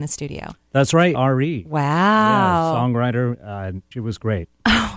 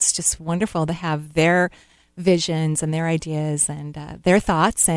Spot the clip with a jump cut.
first; 2 cuts; at 1.1 s, 3.9 s

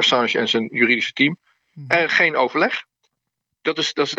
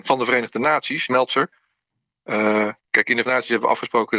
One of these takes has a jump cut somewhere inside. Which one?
second; 3 cuts; at 1.1 s, 2.8 s, 3.2 s

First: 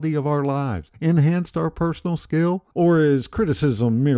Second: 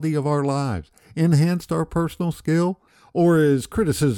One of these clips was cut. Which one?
first; 2 cuts; at 0.9 s, 2.7 s

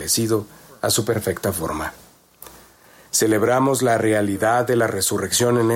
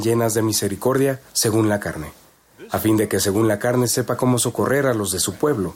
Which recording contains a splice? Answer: second; 1 cut; at 1.3 s

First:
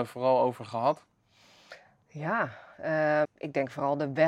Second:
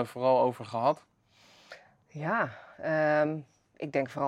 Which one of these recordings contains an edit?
first; 1 cut; at 3.2 s

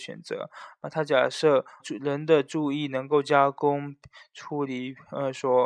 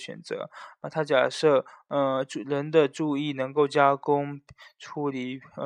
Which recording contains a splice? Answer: first; 1 cut; at 1.8 s

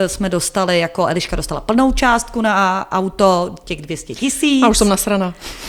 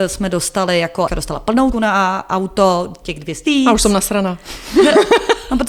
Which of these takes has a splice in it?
second; 3 cuts; at 1.1 s, 1.7 s, 3.5 s

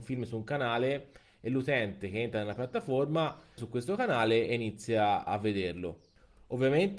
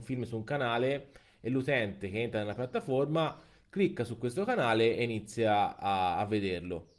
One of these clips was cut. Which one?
first; 2 cuts; at 3.6 s, 5.3 s

